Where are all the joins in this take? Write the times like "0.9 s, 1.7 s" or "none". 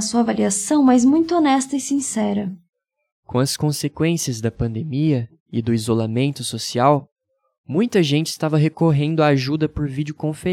none

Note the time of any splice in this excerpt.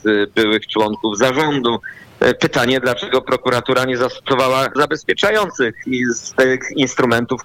4.8 s

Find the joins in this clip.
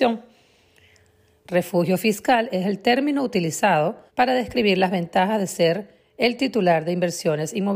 4.1 s

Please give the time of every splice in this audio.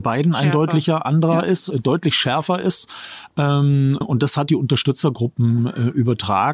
1.7 s, 4.0 s, 4.5 s

